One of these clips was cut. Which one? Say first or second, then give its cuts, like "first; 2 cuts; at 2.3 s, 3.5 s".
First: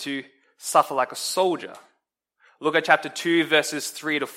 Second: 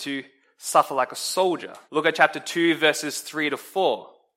second; 1 cut; at 1.9 s